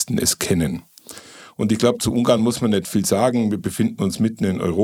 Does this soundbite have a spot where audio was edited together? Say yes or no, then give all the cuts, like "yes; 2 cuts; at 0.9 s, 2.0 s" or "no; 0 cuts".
no; 0 cuts